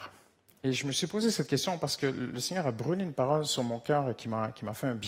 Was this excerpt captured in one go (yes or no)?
yes